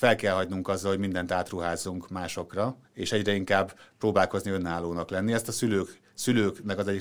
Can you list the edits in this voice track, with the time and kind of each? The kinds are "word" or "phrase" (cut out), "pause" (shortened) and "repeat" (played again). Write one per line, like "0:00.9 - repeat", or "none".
0:02.8 - pause

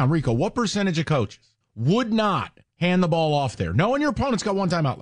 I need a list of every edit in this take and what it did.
0:01.6 - pause

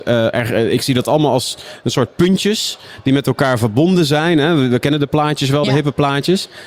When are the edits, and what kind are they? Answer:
none

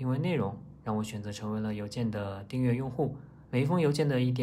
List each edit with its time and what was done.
0:03.4 - pause

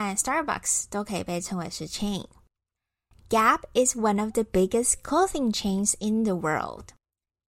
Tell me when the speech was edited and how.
none

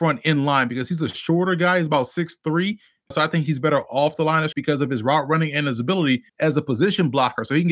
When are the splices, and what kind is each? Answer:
0:03.1 - word
0:04.5 - word
0:06.3 - pause

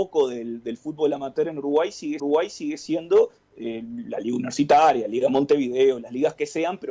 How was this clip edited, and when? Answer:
0:02.2 - repeat

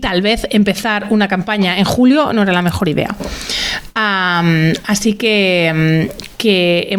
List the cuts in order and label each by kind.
none

